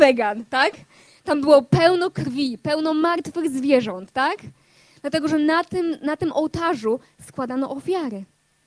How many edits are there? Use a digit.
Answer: 0